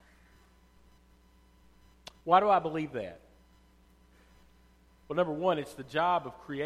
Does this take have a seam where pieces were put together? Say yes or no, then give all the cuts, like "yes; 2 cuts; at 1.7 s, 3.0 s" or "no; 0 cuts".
no; 0 cuts